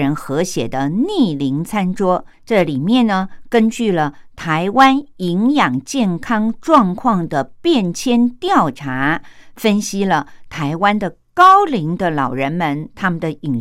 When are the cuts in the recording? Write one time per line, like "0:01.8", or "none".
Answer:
0:02.3